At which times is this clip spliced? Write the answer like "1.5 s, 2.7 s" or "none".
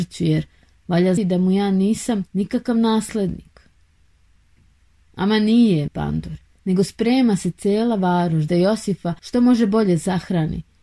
1.2 s, 2.3 s, 5.9 s, 6.6 s, 8.5 s, 9.2 s